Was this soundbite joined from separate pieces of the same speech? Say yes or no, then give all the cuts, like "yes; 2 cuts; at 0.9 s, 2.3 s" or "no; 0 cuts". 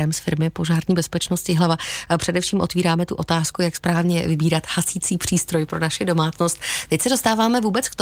no; 0 cuts